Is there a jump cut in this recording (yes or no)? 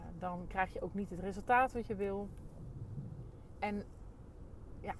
no